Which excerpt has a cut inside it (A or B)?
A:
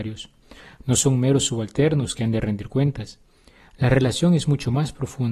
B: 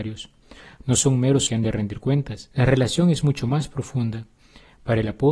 B